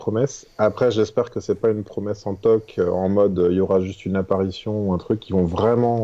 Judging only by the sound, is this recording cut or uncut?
uncut